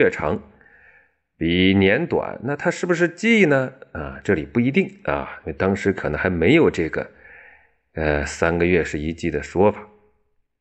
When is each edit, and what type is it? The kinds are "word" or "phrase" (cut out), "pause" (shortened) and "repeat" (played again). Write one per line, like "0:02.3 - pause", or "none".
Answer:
none